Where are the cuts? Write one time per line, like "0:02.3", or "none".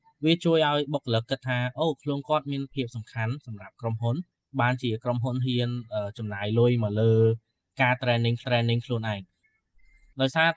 0:08.4